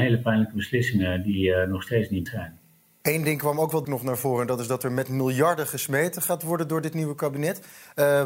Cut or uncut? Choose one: cut